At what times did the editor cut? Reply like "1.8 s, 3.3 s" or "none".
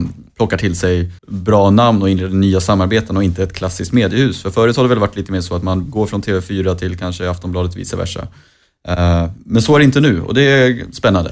1.2 s, 9.4 s